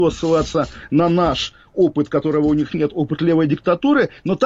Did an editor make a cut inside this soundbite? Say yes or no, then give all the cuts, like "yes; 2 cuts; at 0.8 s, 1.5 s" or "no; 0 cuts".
no; 0 cuts